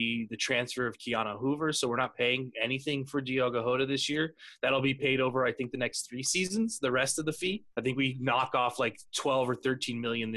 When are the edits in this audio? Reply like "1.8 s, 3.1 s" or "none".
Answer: 7.7 s, 9.1 s